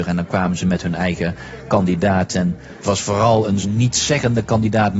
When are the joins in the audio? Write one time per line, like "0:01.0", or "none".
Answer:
0:02.8
0:03.6

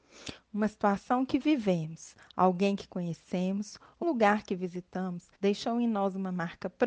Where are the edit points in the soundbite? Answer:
0:04.0
0:05.3

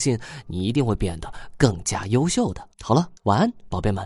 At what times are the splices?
0:02.7
0:03.2

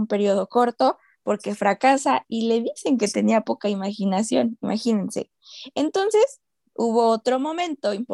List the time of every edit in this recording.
none

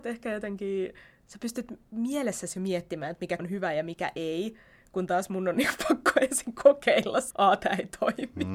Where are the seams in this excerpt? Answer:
0:03.4
0:07.3

